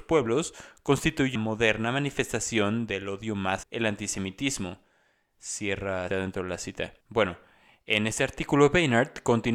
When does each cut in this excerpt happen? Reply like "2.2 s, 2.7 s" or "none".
1.3 s, 3.6 s, 6.1 s, 7.0 s

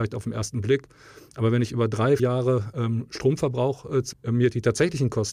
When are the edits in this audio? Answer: 2.2 s, 4.1 s

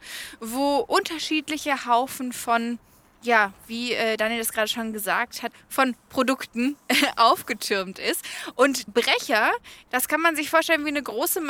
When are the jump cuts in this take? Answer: 3.6 s, 8.9 s

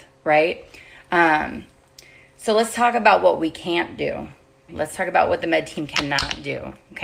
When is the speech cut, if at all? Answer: 4.7 s

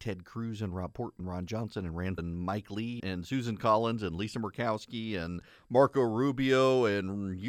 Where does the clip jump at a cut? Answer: 1.2 s, 2.2 s, 3.0 s

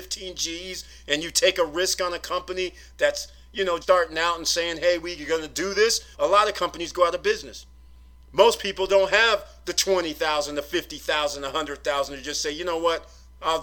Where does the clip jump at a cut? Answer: 3.8 s, 6.1 s

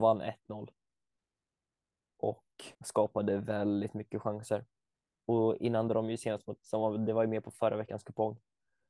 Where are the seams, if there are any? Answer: 2.7 s, 4.9 s, 5.9 s, 6.6 s

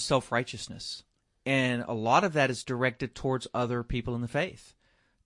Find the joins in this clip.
1.2 s

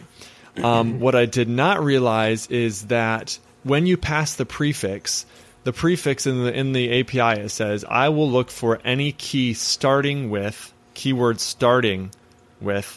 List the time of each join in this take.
none

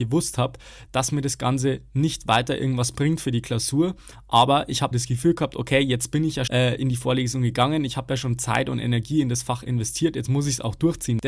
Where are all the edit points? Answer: 4.9 s, 6.5 s

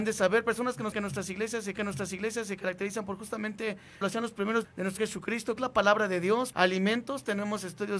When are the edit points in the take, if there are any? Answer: 0.9 s, 1.8 s, 4.0 s, 4.6 s, 5.0 s, 5.6 s, 6.5 s

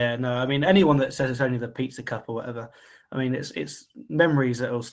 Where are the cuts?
none

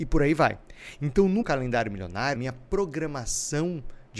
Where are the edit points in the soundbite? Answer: 1.4 s, 2.4 s

